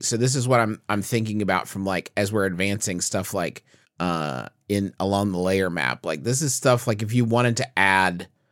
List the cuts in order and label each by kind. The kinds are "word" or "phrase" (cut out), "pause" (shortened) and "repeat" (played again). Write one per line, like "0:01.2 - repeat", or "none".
0:03.8 - pause